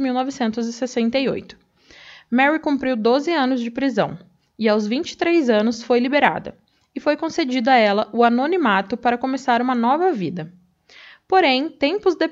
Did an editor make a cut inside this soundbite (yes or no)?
no